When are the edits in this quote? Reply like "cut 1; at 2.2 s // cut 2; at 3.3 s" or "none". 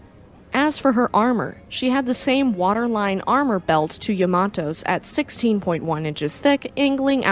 none